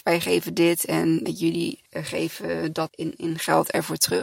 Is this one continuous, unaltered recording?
no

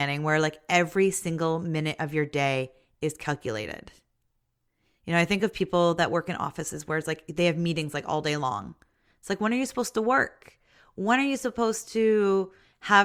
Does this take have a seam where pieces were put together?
no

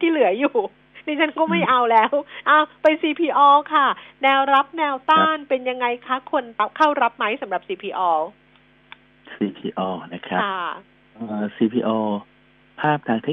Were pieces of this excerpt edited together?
no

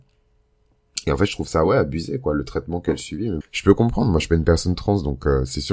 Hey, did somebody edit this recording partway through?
yes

